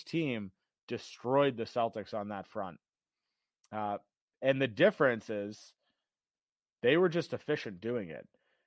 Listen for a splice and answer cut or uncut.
uncut